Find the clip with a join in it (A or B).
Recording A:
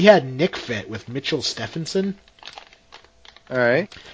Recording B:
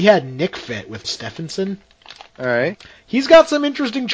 B